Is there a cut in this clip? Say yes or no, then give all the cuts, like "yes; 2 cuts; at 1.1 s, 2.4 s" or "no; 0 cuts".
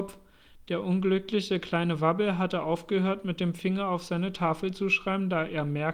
no; 0 cuts